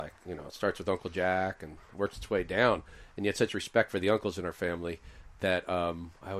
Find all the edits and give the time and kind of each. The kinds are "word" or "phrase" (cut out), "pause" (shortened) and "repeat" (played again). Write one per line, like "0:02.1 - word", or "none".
none